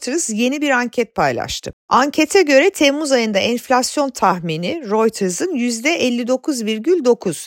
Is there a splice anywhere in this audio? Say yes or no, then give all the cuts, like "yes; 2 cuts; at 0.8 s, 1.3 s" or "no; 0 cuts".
no; 0 cuts